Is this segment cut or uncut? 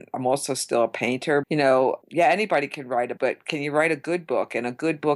cut